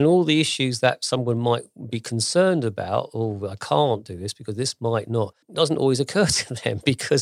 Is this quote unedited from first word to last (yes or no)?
no